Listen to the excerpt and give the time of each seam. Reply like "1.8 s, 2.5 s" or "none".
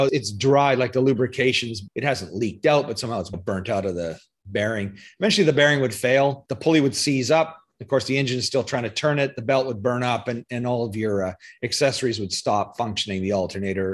none

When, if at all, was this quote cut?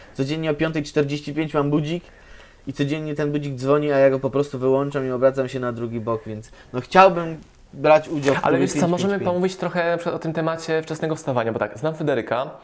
none

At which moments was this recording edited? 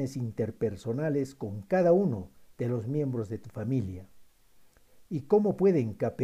none

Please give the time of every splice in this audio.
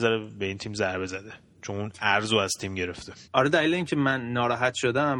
3.3 s

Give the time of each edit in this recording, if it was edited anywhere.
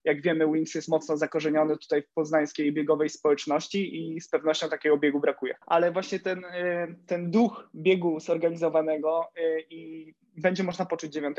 5.6 s

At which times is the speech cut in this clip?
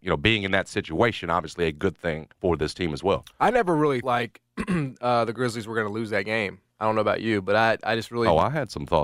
2.3 s, 4.0 s, 6.7 s

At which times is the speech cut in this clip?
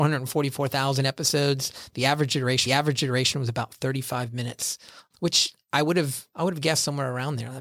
2.7 s, 5.1 s

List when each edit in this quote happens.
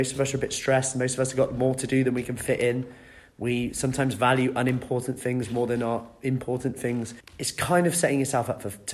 7.2 s

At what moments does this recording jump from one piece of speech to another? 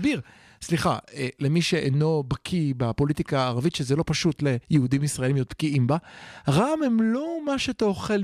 4.6 s

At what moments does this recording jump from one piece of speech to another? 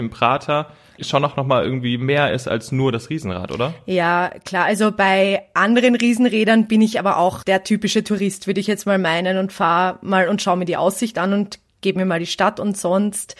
1.0 s, 7.4 s

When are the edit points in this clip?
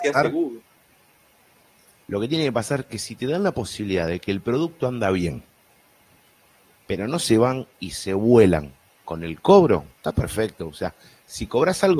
none

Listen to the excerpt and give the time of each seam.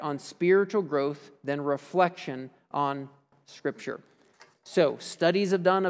none

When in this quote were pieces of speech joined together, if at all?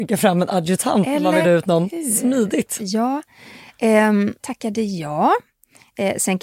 1.4 s, 4.4 s

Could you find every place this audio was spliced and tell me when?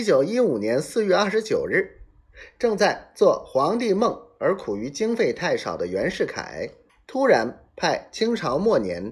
6.9 s

